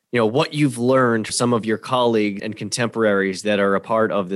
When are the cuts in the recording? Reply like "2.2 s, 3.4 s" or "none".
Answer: 1.3 s, 2.4 s